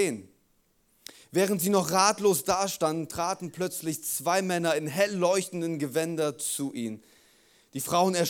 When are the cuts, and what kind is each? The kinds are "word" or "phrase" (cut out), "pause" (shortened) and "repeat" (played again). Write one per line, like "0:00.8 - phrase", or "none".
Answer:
none

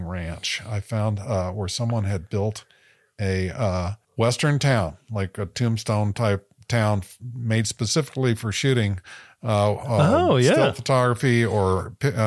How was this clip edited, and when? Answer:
0:04.0 - pause

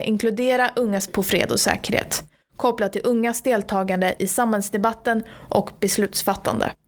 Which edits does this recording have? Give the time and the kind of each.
0:01.1 - word

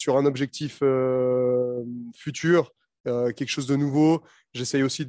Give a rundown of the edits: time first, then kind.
none

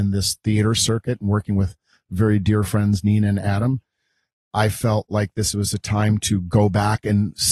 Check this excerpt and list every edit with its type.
none

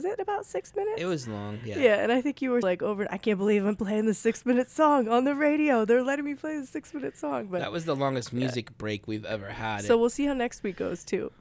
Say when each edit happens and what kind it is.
0:02.6 - word

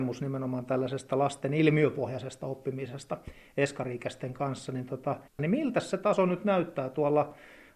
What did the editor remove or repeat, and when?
0:05.3 - pause

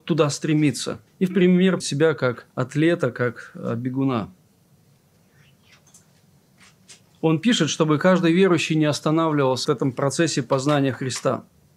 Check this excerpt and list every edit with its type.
0:01.1 - pause
0:01.8 - word
0:02.5 - pause
0:09.6 - word

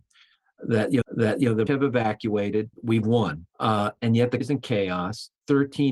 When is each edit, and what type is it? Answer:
0:01.0 - repeat
0:01.7 - word
0:02.7 - pause
0:03.5 - pause
0:04.4 - word

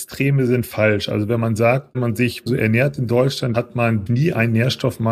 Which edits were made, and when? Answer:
0:01.9 - word
0:02.5 - word
0:03.5 - word
0:04.1 - word

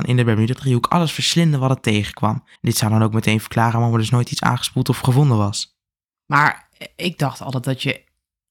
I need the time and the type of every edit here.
0:02.6 - pause
0:06.0 - pause

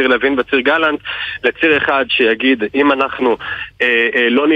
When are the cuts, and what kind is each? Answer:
none

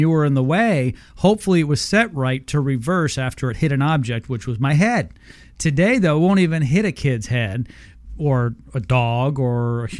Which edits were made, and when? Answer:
none

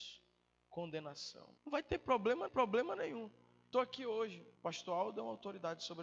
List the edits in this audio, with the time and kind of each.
0:01.6 - pause
0:02.5 - repeat
0:03.7 - word
0:04.6 - pause

